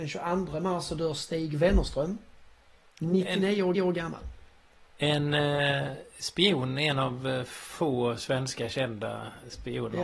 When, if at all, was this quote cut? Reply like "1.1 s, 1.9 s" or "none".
3.7 s